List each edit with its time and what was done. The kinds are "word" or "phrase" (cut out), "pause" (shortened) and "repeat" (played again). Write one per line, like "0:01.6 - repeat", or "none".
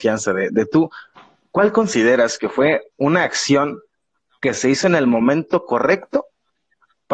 none